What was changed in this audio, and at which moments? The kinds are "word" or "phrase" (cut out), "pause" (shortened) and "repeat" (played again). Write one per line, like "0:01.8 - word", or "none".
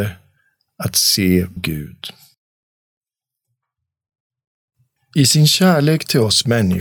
0:01.6 - word